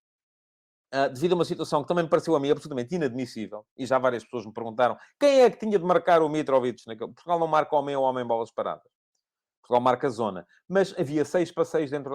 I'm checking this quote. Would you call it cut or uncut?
uncut